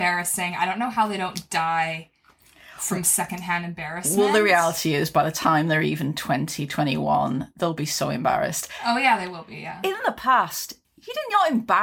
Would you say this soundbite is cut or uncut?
cut